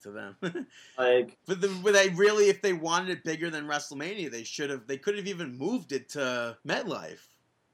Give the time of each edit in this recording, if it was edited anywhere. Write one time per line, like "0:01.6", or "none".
0:06.6